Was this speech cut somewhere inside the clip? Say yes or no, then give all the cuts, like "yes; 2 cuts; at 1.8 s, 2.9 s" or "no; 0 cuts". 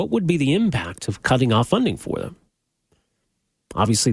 no; 0 cuts